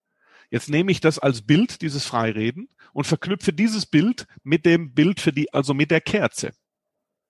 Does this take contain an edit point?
yes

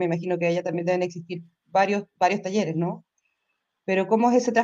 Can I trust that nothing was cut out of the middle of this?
yes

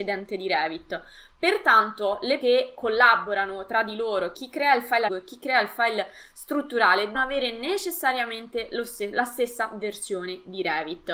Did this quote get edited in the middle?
yes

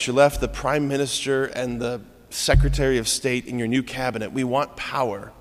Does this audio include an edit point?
no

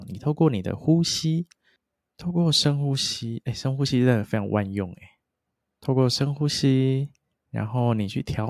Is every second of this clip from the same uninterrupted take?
yes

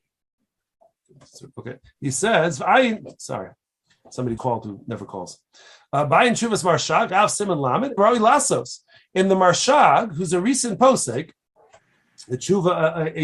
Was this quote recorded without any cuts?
no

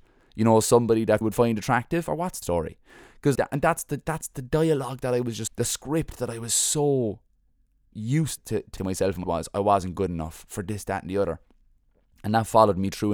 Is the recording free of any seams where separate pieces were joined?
no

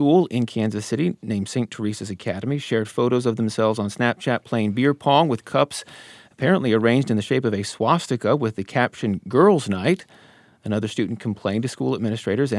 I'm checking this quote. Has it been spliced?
no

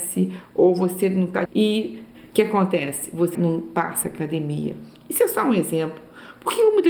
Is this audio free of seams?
no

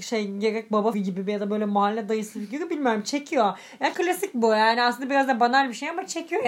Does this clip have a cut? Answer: yes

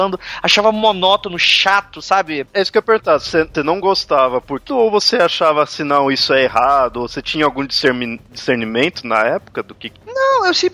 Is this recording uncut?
no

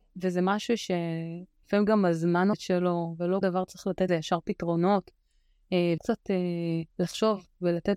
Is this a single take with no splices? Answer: no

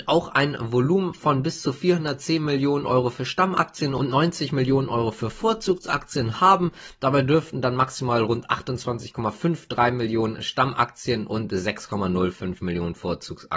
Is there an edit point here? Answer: no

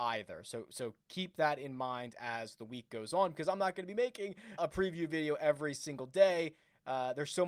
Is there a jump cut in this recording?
yes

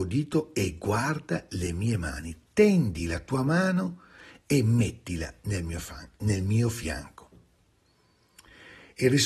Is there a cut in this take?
no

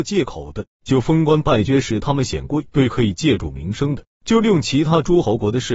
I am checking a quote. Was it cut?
yes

